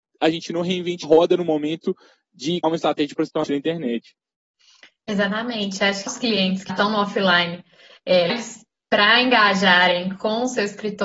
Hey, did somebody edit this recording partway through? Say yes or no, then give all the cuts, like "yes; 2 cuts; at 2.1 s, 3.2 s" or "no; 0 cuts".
yes; 6 cuts; at 1.0 s, 2.6 s, 3.4 s, 6.1 s, 6.7 s, 8.3 s